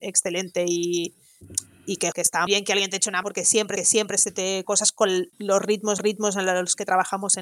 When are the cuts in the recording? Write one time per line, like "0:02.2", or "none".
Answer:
0:02.1
0:02.5
0:03.2
0:03.8
0:04.6
0:05.3
0:06.0